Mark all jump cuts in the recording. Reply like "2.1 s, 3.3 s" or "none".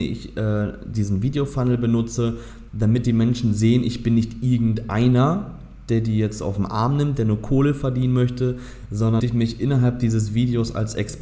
9.2 s